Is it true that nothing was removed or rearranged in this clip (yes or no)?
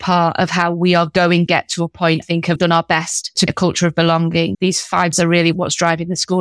no